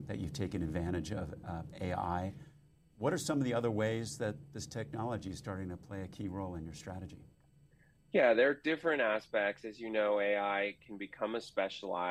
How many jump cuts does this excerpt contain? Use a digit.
1